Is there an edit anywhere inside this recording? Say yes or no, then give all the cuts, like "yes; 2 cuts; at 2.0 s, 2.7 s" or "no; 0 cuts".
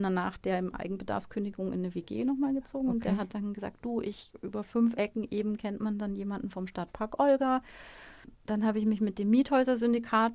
yes; 1 cut; at 8.4 s